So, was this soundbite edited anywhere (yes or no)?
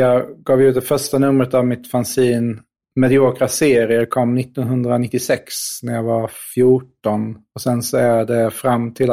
no